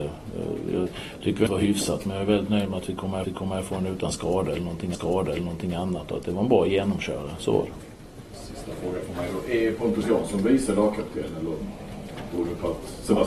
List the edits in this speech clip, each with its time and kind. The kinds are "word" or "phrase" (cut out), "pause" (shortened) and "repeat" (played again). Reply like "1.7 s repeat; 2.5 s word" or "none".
1.5 s phrase; 3.2 s repeat; 4.9 s repeat